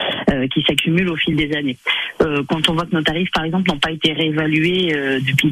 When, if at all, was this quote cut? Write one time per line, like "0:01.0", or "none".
none